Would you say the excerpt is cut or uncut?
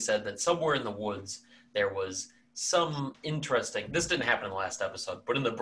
uncut